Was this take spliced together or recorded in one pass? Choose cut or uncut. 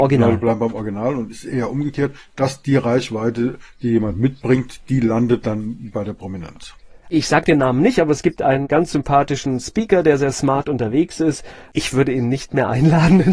uncut